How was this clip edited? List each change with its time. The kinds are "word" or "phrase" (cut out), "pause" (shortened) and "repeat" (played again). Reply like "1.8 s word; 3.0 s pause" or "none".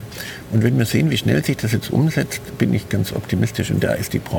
none

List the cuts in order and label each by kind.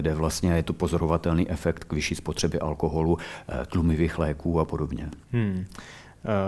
5.2 s pause

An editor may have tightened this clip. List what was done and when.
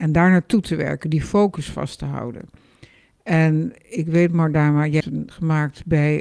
5.0 s word; 5.3 s word

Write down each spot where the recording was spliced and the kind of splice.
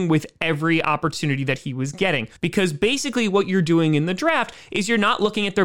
2.4 s pause

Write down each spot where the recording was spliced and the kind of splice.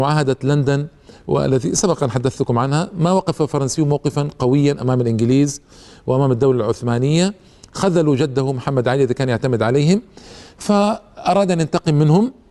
none

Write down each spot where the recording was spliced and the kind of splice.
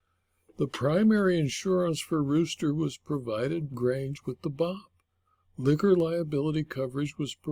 3.7 s word

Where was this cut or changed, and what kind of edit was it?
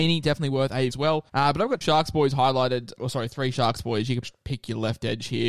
0.9 s phrase; 1.3 s pause; 1.8 s word; 3.0 s word; 4.2 s word

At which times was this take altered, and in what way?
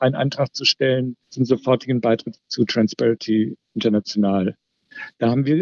1.2 s pause

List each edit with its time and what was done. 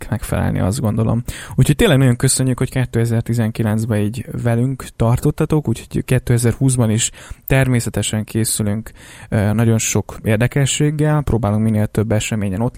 none

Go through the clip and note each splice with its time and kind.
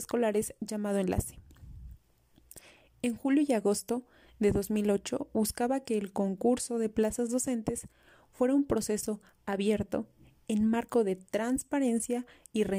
none

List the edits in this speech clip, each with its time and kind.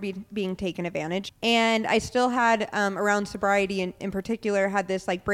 1.3 s word; 4.0 s word

